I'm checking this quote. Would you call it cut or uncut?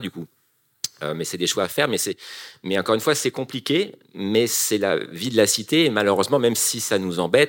uncut